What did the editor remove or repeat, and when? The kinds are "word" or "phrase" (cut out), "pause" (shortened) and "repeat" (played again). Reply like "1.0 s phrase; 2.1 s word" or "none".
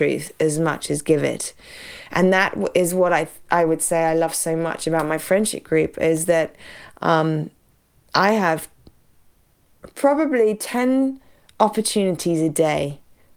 none